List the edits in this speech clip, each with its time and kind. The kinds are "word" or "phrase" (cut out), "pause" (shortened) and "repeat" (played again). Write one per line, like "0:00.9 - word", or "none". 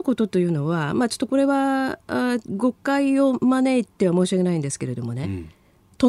none